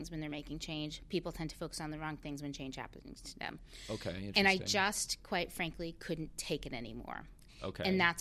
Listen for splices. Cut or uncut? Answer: uncut